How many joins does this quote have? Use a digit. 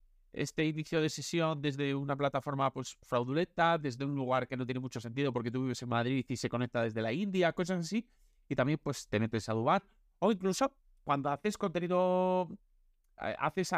0